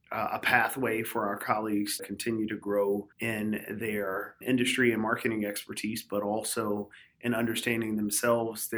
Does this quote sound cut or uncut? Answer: cut